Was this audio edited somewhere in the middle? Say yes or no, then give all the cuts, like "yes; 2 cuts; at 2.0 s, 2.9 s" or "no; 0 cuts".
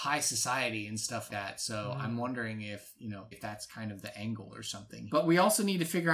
yes; 3 cuts; at 1.3 s, 3.3 s, 5.1 s